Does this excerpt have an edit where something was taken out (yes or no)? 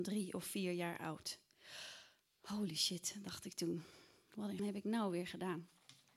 yes